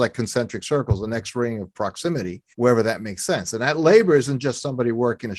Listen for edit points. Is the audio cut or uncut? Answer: cut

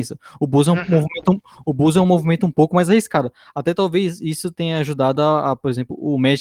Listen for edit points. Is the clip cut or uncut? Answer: uncut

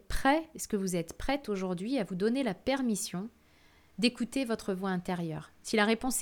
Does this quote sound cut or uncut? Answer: uncut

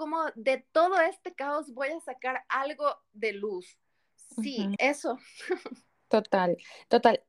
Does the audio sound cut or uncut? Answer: cut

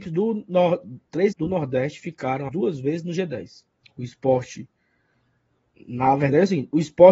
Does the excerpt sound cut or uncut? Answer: cut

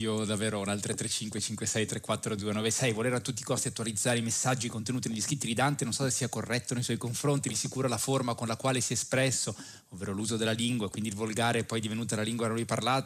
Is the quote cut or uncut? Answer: uncut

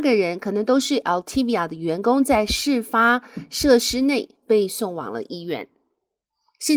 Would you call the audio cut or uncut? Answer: uncut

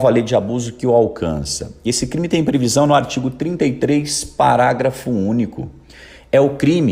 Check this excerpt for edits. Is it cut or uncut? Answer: uncut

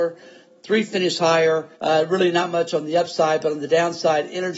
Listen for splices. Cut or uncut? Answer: cut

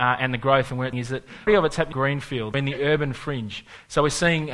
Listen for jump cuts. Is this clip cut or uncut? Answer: cut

